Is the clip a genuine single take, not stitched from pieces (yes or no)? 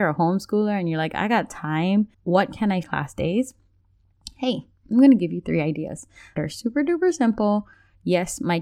no